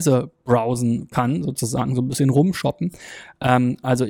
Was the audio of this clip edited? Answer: no; 0 cuts

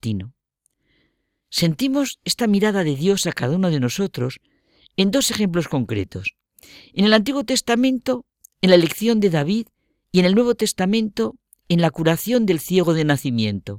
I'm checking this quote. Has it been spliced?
no; 0 cuts

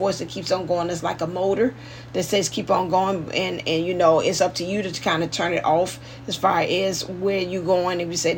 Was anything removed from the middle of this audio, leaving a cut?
no; 0 cuts

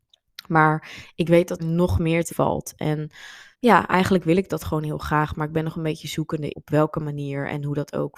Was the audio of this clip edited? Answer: yes; 4 cuts; at 1.6 s, 2.3 s, 3.5 s, 6.5 s

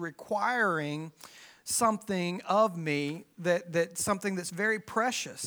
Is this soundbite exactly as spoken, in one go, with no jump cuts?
yes; 0 cuts

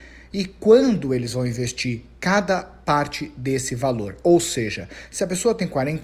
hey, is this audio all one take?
yes; 0 cuts

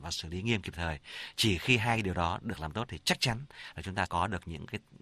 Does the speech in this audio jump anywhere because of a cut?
yes; 1 cut; at 4.1 s

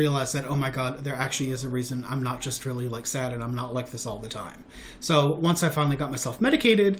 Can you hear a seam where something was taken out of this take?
no; 0 cuts

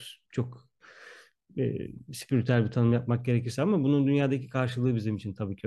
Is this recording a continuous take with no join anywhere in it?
yes; 0 cuts

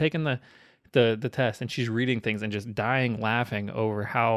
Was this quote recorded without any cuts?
yes; 0 cuts

